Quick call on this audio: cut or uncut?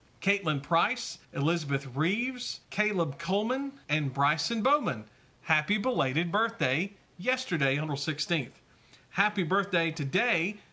cut